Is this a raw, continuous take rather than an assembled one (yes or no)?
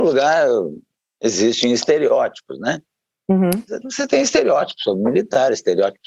no